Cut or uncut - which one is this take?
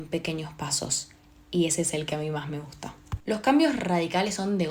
uncut